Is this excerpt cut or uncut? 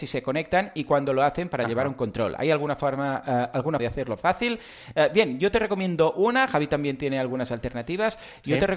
cut